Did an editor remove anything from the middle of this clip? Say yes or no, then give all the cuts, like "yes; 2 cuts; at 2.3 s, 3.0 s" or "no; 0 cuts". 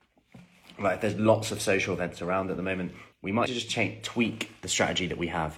yes; 2 cuts; at 3.1 s, 3.5 s